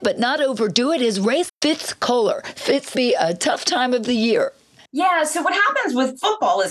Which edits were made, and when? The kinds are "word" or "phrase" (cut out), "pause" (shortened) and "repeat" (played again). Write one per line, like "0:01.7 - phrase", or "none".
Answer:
0:01.5 - phrase
0:02.9 - phrase